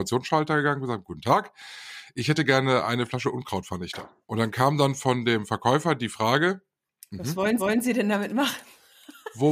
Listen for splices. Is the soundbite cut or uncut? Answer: cut